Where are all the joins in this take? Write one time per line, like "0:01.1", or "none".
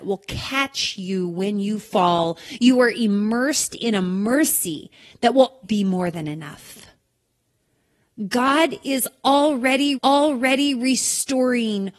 0:05.6
0:09.9